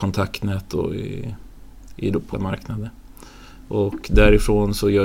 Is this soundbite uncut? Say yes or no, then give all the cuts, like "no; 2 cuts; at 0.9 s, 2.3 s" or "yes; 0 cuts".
no; 1 cut; at 2.3 s